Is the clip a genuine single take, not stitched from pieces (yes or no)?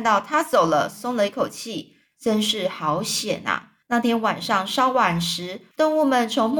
no